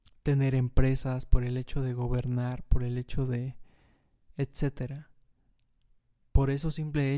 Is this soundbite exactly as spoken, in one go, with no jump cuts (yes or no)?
yes